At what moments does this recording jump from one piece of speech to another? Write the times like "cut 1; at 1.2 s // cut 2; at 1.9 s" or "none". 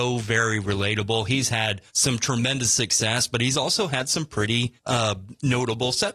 cut 1; at 1.9 s // cut 2; at 4.8 s